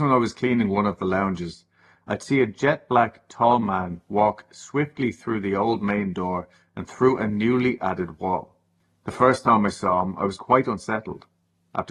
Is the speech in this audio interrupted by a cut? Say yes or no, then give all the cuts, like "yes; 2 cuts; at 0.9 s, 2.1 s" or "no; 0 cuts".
no; 0 cuts